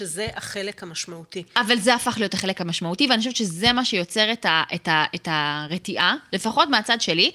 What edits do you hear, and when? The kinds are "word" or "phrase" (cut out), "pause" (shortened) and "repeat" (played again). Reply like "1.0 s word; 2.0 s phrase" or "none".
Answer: none